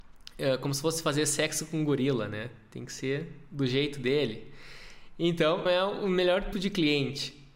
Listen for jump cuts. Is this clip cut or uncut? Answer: cut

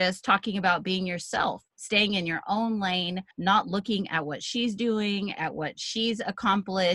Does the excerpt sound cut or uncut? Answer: cut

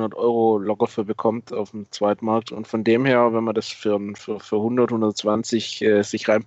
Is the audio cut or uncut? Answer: uncut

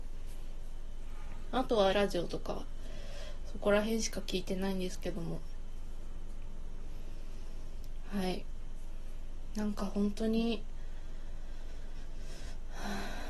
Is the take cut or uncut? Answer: cut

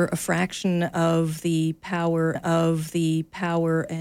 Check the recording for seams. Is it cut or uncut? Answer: cut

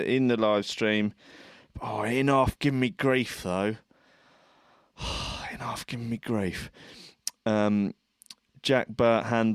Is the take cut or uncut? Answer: uncut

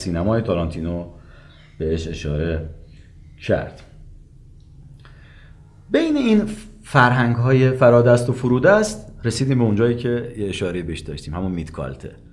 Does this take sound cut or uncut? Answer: uncut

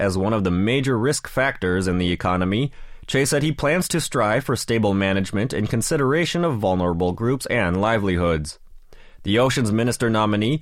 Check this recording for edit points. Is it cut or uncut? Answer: uncut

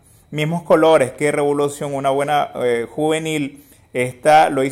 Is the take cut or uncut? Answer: uncut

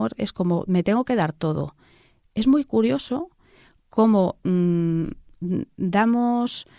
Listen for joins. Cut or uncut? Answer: uncut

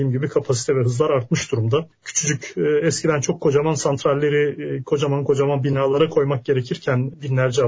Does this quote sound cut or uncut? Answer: uncut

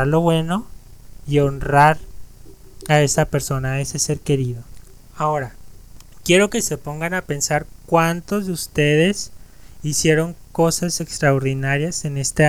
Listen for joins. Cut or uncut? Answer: uncut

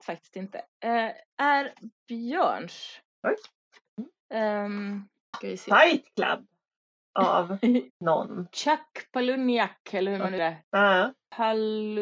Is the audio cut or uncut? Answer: cut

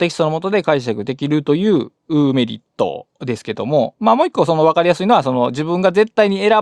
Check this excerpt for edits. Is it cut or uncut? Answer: cut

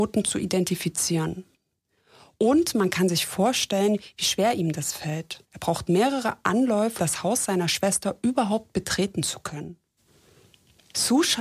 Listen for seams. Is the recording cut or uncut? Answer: cut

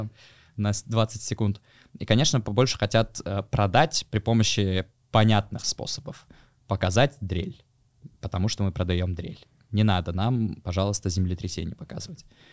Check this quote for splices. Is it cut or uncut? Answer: cut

